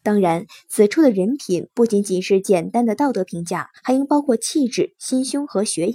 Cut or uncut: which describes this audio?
cut